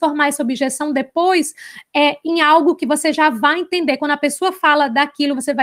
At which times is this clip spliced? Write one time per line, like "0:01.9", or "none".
none